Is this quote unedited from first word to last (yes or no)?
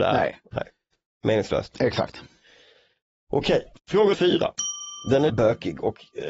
no